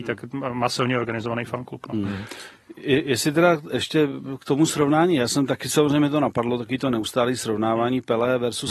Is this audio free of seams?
yes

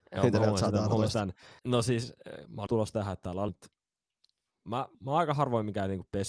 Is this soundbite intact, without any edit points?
no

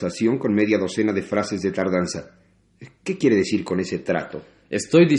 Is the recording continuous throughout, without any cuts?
yes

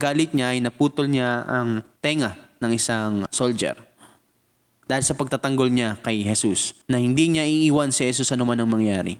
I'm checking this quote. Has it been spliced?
yes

